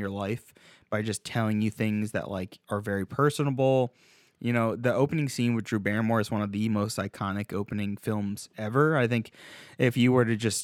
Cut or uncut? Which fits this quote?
uncut